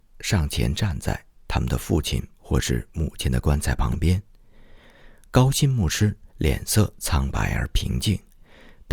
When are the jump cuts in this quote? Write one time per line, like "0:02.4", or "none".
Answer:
0:06.3